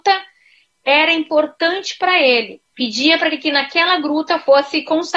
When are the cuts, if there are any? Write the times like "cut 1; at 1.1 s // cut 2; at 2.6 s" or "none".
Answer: cut 1; at 2.7 s